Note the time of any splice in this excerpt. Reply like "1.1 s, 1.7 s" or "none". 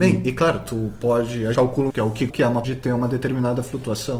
1.5 s, 1.9 s, 2.3 s, 2.6 s